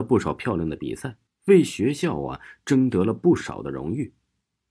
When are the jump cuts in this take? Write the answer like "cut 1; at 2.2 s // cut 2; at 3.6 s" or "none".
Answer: cut 1; at 1.3 s